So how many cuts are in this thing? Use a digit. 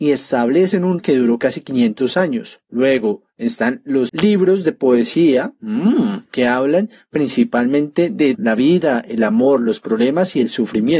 3